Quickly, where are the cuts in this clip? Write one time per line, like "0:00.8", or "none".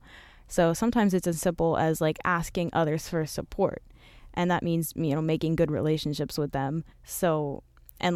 0:06.9